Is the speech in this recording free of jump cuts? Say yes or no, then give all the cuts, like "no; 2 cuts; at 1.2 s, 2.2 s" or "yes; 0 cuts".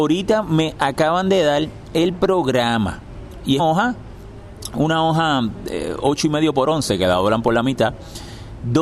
no; 1 cut; at 3.6 s